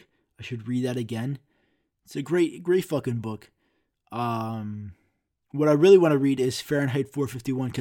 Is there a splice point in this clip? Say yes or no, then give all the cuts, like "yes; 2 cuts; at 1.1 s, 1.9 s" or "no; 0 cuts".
no; 0 cuts